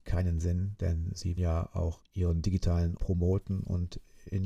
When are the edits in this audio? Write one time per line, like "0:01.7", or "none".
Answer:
0:01.4
0:02.0
0:03.0